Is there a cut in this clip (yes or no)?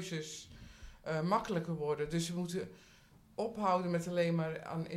no